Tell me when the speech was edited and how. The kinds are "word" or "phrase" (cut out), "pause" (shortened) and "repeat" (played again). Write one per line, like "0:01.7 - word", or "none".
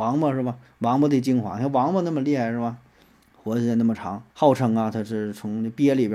0:03.2 - pause
0:04.3 - pause

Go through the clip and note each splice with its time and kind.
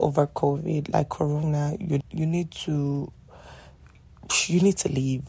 0:02.0 - word

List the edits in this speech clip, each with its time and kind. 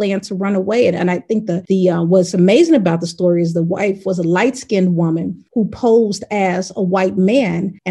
none

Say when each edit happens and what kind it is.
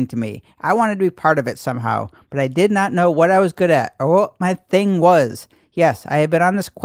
none

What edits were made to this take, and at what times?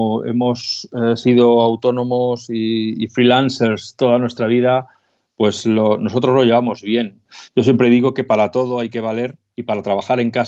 none

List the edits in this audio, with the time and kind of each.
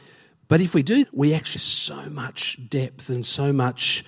0:01.0 - word
0:01.6 - word

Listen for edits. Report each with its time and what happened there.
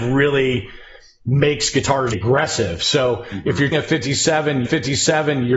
0:02.1 - word
0:03.7 - word
0:04.7 - repeat

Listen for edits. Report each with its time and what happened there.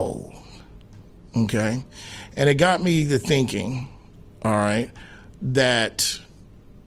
none

